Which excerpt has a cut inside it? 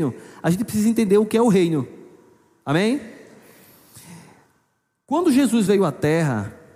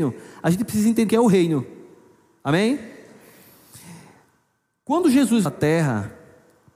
second; 2 cuts; at 1.1 s, 5.5 s

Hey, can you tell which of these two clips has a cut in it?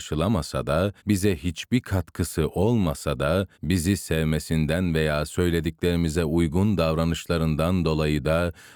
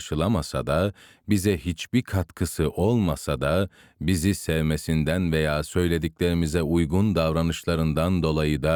first; 2 cuts; at 1.0 s, 3.5 s

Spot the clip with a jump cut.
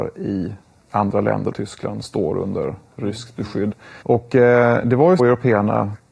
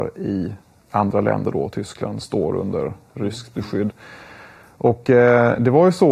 first; 3 cuts; at 1.5 s, 4.0 s, 5.2 s

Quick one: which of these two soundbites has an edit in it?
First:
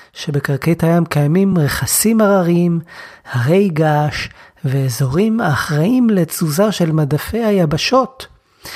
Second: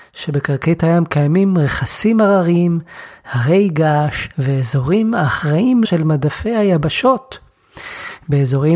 second; 2 cuts; at 4.3 s, 5.8 s

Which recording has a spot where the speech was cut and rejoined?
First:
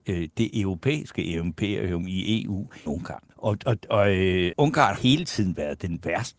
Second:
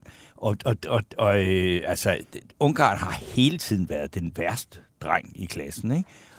first; 5 cuts; at 2.9 s, 3.3 s, 3.8 s, 4.5 s, 5.0 s

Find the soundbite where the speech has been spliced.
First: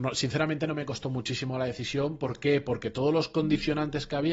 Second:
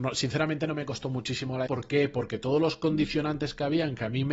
second; 1 cut; at 1.7 s

